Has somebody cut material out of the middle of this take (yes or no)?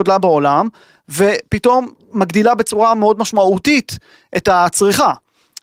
no